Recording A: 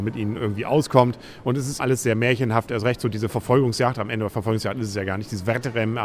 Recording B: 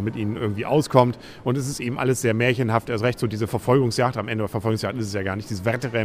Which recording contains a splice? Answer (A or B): A